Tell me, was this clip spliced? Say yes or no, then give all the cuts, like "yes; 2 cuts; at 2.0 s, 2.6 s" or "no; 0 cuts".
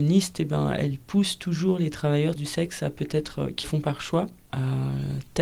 yes; 2 cuts; at 2.4 s, 3.6 s